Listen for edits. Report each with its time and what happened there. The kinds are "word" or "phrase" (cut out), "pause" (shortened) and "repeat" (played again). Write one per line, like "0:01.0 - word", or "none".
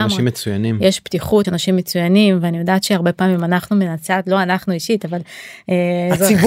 0:01.4 - word